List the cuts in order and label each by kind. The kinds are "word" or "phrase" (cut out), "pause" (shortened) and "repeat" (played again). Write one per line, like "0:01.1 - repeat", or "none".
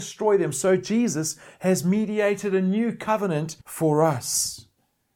0:03.6 - pause